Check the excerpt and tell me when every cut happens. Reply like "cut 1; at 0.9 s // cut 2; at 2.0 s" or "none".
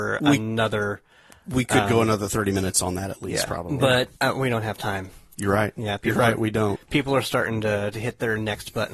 cut 1; at 4.2 s